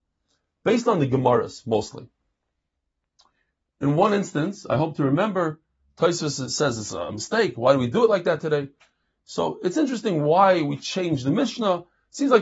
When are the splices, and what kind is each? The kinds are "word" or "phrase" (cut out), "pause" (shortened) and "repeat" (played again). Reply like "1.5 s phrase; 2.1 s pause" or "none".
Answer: none